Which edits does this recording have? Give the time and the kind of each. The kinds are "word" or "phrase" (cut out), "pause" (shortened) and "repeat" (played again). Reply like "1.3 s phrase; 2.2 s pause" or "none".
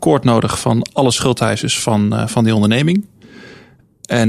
none